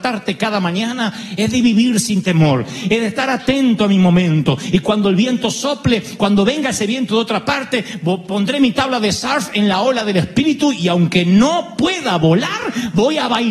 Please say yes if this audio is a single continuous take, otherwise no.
yes